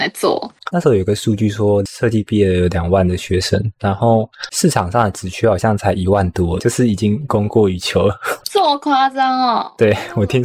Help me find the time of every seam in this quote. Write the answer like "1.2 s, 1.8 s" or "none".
6.6 s, 8.4 s